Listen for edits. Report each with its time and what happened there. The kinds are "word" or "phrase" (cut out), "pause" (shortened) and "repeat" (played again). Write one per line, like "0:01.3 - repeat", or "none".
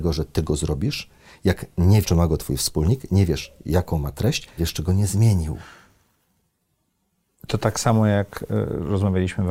0:02.0 - word
0:04.6 - word